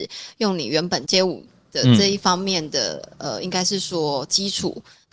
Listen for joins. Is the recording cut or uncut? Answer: uncut